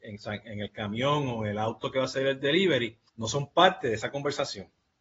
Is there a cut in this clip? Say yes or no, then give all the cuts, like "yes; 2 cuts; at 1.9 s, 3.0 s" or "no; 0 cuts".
yes; 1 cut; at 3.1 s